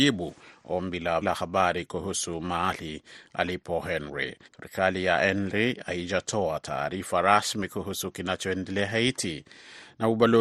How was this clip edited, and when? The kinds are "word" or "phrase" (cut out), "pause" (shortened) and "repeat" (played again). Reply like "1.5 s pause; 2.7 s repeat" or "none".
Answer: 1.2 s word; 4.4 s pause